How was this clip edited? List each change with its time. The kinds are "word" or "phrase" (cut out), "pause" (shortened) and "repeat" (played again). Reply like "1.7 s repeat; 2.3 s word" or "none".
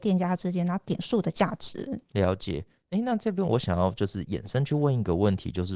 2.0 s pause